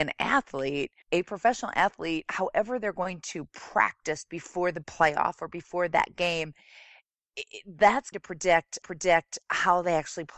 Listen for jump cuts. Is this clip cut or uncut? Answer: cut